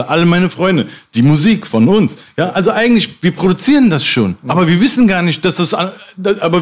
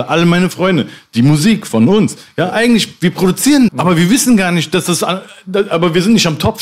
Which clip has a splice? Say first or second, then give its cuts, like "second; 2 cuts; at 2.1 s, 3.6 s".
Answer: second; 2 cuts; at 2.5 s, 3.7 s